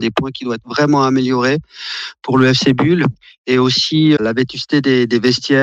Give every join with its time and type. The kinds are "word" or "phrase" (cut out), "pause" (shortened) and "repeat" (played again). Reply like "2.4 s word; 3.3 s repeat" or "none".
4.2 s word